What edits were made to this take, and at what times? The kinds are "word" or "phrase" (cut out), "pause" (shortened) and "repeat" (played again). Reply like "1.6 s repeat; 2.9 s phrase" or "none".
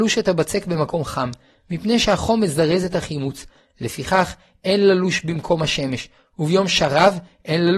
none